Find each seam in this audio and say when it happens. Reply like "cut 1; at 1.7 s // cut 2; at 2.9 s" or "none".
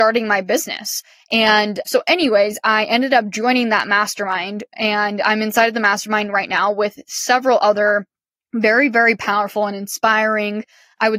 none